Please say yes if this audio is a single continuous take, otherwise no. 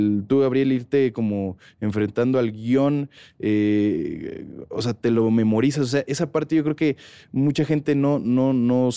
yes